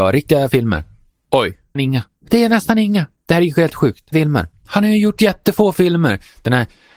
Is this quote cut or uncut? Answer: cut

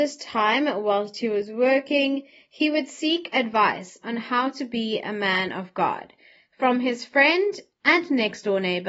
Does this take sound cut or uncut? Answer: uncut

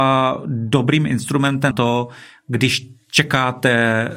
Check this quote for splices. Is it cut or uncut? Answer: cut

